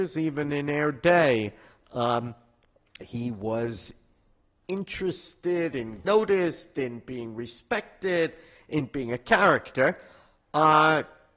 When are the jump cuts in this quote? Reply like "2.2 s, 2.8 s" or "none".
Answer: 3.0 s, 6.0 s